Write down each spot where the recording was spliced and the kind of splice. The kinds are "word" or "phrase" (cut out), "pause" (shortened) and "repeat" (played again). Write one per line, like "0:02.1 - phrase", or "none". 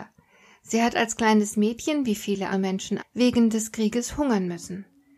0:02.5 - word
0:03.0 - word